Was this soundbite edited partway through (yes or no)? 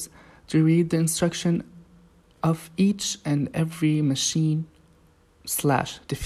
no